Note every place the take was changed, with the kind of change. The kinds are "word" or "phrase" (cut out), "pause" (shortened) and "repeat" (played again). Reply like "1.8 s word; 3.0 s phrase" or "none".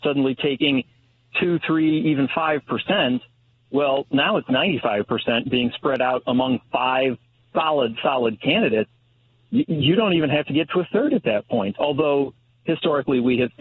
none